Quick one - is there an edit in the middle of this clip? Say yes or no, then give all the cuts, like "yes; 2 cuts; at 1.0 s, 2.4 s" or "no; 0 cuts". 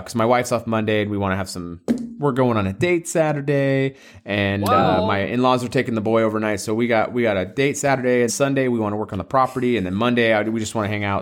yes; 1 cut; at 8.3 s